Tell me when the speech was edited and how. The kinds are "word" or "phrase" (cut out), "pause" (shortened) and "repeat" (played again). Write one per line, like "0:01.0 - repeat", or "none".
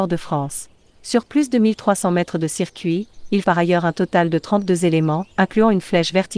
0:03.4 - word
0:05.3 - pause